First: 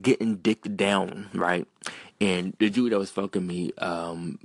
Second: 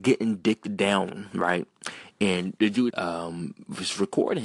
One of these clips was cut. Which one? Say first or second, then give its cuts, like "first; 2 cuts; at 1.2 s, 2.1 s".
second; 1 cut; at 2.9 s